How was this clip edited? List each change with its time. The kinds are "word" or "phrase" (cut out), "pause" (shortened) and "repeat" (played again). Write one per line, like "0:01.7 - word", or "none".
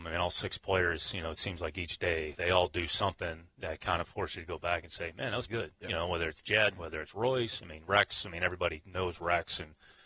0:05.5 - word